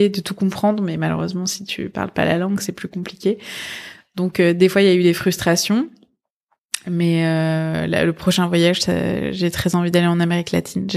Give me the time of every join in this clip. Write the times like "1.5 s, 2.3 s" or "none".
none